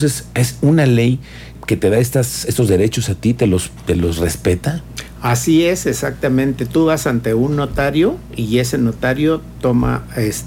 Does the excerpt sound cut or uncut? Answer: cut